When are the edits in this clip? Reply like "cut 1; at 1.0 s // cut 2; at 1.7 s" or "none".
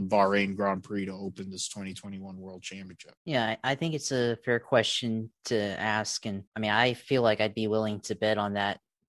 cut 1; at 3.2 s // cut 2; at 6.5 s